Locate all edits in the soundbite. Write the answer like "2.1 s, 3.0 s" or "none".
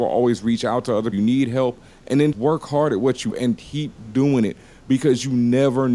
1.1 s, 2.3 s, 3.3 s